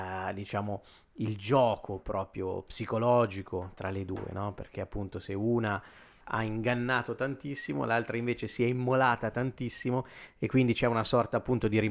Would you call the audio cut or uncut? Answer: uncut